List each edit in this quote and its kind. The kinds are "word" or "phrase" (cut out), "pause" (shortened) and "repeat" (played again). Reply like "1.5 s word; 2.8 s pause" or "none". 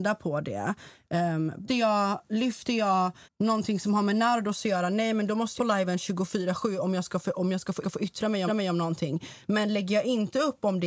1.7 s word; 3.2 s pause; 5.6 s phrase; 7.8 s repeat; 8.5 s repeat